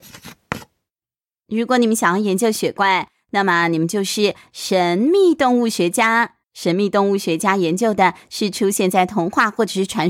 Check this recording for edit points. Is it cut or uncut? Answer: cut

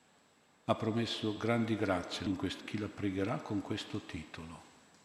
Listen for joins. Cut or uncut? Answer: cut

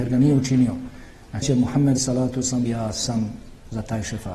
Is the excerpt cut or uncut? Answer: cut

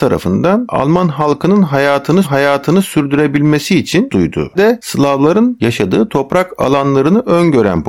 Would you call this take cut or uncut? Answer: cut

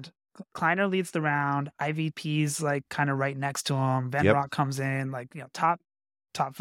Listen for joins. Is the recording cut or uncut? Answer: uncut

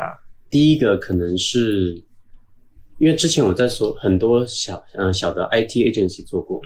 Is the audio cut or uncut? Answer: uncut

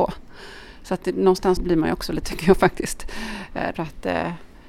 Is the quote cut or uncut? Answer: cut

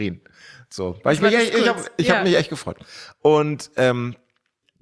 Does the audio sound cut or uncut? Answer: uncut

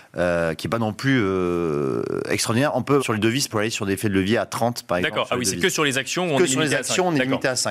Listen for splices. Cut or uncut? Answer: cut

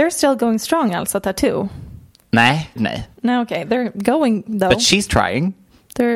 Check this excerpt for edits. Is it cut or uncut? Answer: cut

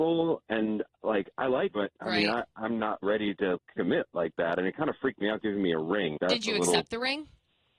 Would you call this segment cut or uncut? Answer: cut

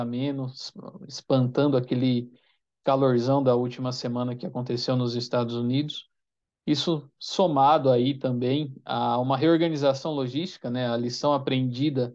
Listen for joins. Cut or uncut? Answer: uncut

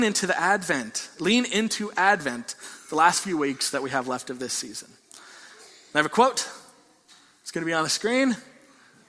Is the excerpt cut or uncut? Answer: uncut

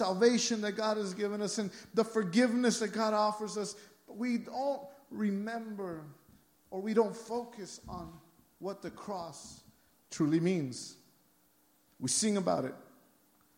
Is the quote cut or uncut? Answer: uncut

